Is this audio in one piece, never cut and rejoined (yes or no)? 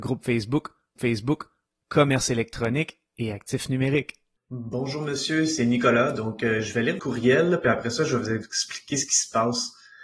no